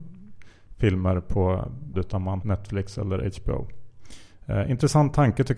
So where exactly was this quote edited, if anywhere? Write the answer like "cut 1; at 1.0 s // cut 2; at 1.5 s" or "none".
cut 1; at 1.9 s // cut 2; at 2.4 s